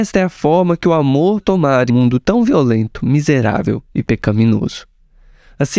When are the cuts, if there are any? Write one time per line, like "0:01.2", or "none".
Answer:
0:01.4
0:01.9